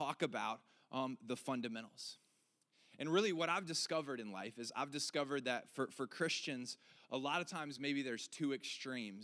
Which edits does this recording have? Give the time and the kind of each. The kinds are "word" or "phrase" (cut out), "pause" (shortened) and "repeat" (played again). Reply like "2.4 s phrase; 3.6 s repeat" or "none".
none